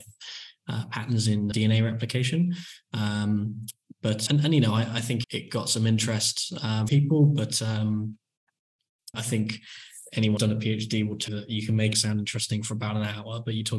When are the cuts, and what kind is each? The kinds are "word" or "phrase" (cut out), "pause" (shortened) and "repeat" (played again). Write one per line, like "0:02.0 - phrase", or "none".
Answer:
0:01.5 - word
0:04.3 - word
0:05.2 - word
0:06.9 - word
0:09.1 - word
0:10.4 - word
0:11.3 - word
0:11.9 - word